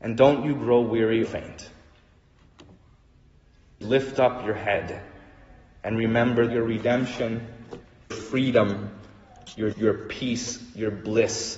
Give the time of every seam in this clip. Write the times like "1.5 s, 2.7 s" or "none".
1.2 s, 3.8 s, 6.5 s, 8.1 s, 9.7 s